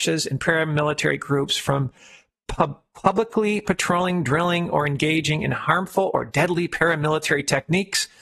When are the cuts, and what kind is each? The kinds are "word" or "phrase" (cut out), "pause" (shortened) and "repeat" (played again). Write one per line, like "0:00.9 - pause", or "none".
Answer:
none